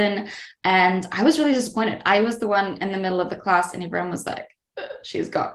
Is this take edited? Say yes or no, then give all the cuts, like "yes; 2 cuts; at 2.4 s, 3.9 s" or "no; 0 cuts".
no; 0 cuts